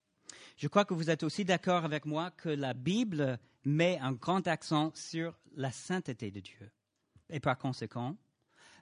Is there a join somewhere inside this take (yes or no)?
yes